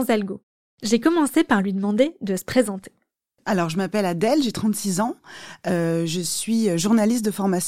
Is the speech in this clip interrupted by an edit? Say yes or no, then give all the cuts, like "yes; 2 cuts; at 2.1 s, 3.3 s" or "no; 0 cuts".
no; 0 cuts